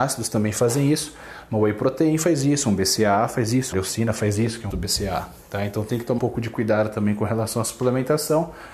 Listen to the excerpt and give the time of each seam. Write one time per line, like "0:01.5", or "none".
0:03.7
0:04.7
0:06.2